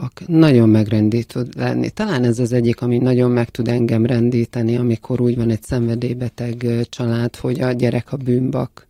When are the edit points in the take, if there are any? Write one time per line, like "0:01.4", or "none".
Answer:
none